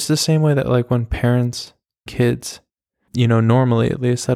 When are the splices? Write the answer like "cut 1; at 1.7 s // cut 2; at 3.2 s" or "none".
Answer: cut 1; at 2.1 s // cut 2; at 3.1 s

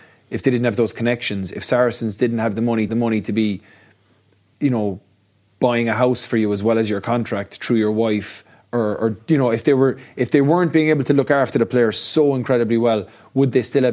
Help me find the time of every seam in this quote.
cut 1; at 2.9 s

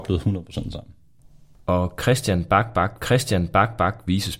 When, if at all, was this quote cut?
cut 1; at 3.0 s

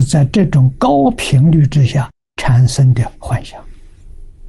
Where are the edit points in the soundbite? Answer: none

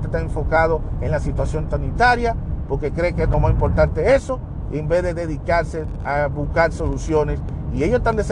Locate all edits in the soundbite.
none

